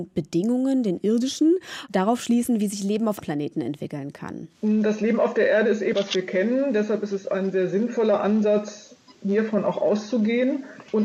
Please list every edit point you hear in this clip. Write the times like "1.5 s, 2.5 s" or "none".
3.2 s, 5.9 s